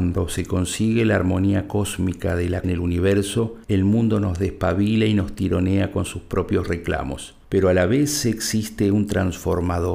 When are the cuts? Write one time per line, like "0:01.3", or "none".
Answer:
0:02.6
0:03.6
0:07.4

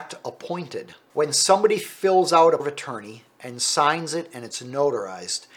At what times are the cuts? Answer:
0:02.6

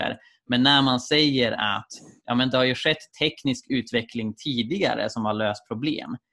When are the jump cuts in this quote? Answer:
none

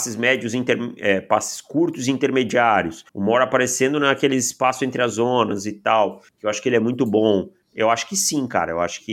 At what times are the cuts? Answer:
0:03.1

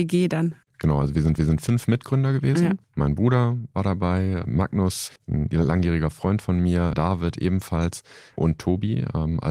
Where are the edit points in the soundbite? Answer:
0:01.4
0:02.8
0:05.2
0:06.9

